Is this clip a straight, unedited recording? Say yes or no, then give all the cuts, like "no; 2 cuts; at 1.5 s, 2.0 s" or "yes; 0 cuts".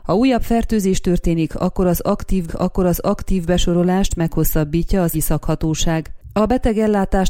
no; 2 cuts; at 2.5 s, 5.1 s